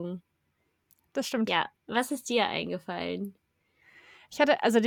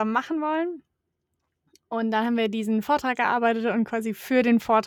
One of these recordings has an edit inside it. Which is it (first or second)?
first